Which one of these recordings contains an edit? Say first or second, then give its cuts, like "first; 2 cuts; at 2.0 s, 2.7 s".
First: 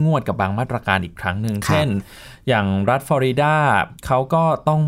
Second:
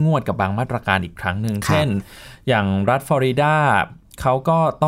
first; 1 cut; at 4.0 s